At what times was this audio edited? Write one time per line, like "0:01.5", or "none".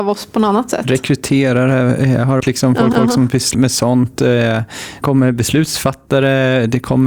0:02.4
0:02.9
0:03.5
0:05.0